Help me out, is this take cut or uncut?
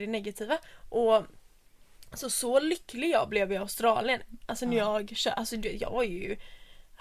uncut